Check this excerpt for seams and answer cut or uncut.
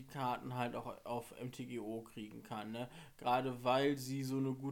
uncut